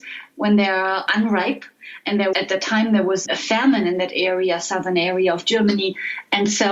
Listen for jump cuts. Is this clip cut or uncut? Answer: cut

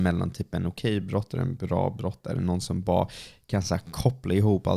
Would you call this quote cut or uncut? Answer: uncut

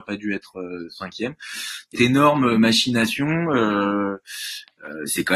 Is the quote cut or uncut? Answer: cut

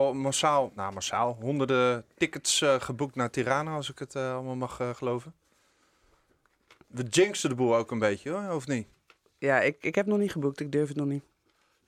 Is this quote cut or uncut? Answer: uncut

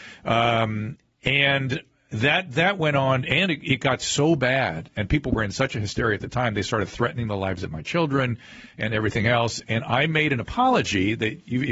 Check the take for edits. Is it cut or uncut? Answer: uncut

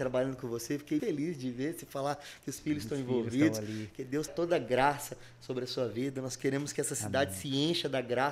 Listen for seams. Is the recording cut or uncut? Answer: cut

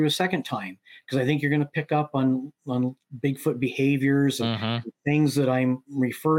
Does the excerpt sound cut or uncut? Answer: uncut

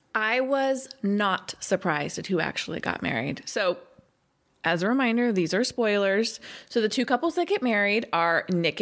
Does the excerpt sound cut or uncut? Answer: uncut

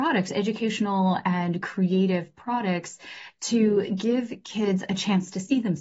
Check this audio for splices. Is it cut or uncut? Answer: uncut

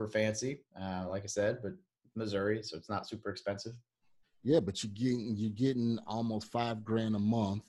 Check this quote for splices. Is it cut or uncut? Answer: uncut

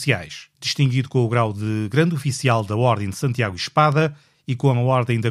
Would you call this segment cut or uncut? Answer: uncut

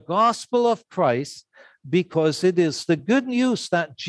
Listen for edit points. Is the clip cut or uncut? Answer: uncut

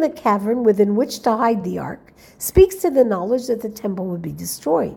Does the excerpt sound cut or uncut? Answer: uncut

